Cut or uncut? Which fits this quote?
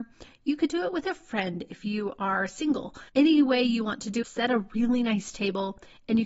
cut